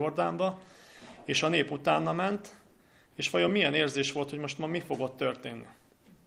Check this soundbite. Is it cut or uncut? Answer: uncut